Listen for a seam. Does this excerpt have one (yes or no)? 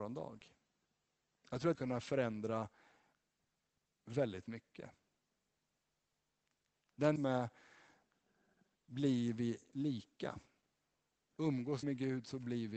yes